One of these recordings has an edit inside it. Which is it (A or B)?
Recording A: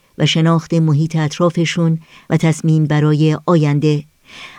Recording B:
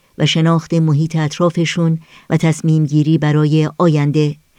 A